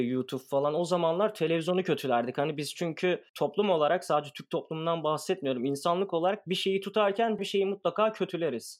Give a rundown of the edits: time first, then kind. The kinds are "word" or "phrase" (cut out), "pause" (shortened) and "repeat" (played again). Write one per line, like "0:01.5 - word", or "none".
0:03.3 - pause
0:07.4 - word